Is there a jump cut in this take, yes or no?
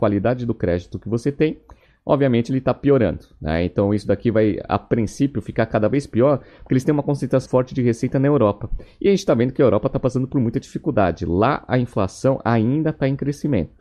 yes